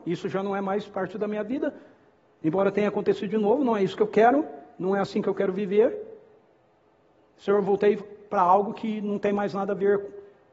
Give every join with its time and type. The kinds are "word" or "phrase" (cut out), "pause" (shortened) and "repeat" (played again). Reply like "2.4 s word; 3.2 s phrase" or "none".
none